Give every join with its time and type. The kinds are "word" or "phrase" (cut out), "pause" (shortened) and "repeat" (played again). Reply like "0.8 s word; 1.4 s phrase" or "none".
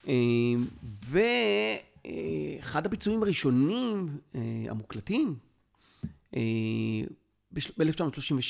none